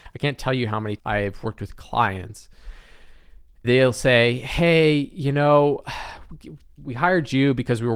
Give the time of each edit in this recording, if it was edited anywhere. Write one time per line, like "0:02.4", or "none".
0:01.0
0:03.6
0:06.8